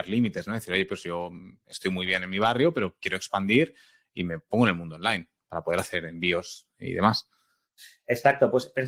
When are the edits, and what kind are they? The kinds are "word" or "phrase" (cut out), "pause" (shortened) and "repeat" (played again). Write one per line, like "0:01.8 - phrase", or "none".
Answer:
none